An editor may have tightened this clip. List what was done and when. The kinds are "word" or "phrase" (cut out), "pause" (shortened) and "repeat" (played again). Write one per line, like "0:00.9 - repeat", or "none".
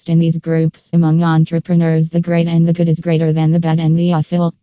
0:00.9 - phrase